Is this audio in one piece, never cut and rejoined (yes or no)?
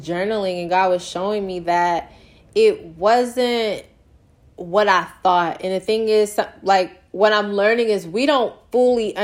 yes